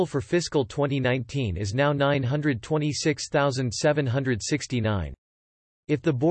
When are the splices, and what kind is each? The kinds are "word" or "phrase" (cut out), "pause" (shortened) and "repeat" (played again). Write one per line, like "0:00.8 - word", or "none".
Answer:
none